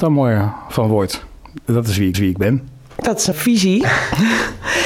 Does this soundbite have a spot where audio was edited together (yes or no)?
yes